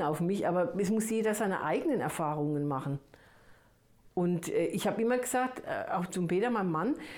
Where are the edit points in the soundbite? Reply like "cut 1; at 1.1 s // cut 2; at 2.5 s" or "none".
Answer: cut 1; at 6.1 s